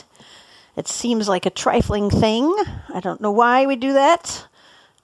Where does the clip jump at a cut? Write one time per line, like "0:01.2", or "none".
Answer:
none